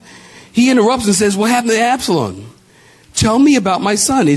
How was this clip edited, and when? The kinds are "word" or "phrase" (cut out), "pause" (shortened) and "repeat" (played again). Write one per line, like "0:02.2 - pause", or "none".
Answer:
none